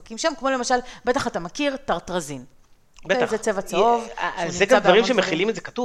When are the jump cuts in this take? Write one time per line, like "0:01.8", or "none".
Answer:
none